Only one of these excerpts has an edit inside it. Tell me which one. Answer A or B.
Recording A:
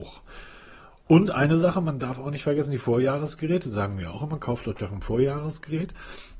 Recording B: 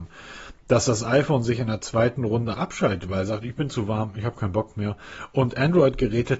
B